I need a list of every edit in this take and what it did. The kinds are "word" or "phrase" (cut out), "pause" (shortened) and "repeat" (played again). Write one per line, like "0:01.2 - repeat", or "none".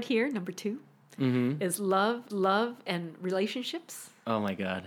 0:02.3 - repeat